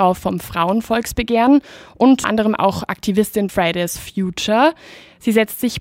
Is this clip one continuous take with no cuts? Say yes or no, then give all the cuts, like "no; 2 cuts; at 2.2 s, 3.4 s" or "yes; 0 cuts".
no; 3 cuts; at 2.2 s, 3.5 s, 4.0 s